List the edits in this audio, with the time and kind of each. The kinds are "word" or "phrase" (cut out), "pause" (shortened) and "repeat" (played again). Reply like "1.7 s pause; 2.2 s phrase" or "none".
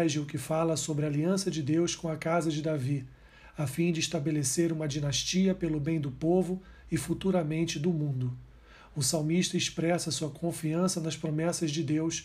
none